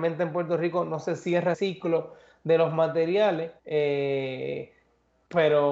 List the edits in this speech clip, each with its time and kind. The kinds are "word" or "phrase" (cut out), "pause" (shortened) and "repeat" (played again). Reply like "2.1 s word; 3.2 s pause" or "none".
1.5 s word; 3.6 s pause